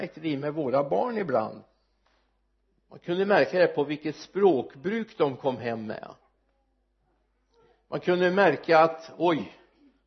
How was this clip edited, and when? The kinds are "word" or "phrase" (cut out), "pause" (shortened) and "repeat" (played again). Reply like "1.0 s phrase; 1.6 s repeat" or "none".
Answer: none